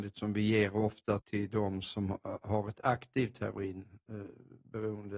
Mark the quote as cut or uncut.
cut